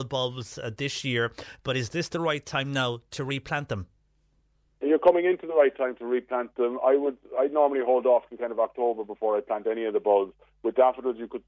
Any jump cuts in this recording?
no; 0 cuts

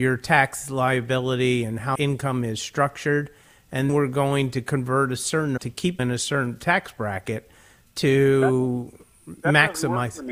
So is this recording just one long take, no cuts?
no; 4 cuts; at 1.9 s, 3.9 s, 5.6 s, 6.0 s

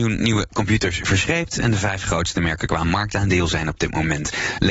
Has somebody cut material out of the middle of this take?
no; 0 cuts

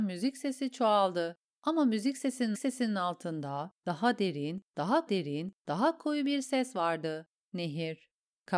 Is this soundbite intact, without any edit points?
no; 2 cuts; at 2.5 s, 5.1 s

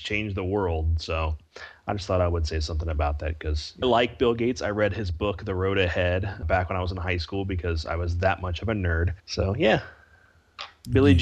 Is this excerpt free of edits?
no; 3 cuts; at 3.8 s, 6.4 s, 9.2 s

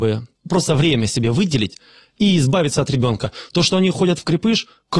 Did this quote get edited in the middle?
no; 0 cuts

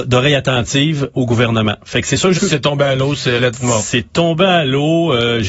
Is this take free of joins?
no; 3 cuts; at 1.1 s, 2.3 s, 3.4 s

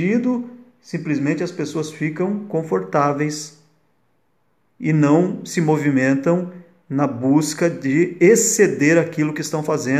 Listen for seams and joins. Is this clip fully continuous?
yes; 0 cuts

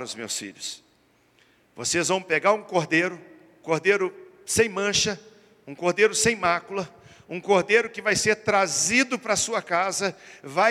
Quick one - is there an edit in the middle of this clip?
yes; 1 cut; at 3.6 s

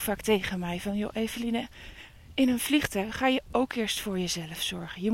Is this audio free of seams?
yes; 0 cuts

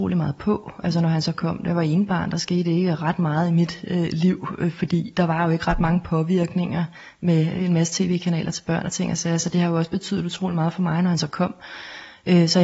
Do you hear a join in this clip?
no; 0 cuts

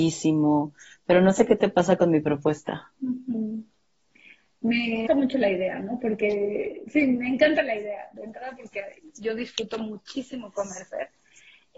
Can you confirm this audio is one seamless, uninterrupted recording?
no; 1 cut; at 5.1 s

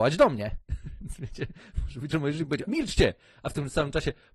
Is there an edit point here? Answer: yes; 2 cuts; at 2.1 s, 2.7 s

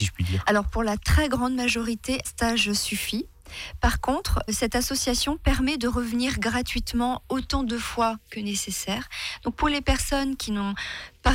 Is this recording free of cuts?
no; 2 cuts; at 2.2 s, 4.5 s

